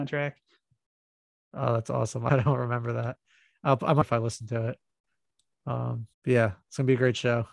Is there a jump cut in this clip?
yes; 3 cuts; at 2.3 s, 4.0 s, 6.1 s

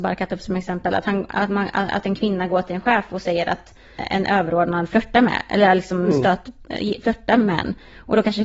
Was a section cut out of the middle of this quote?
yes; 1 cut; at 4.0 s

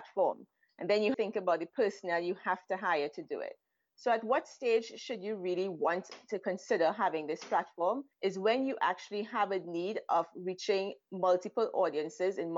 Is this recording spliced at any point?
yes; 1 cut; at 1.1 s

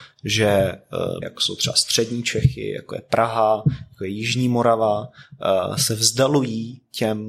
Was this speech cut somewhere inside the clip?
yes; 1 cut; at 1.2 s

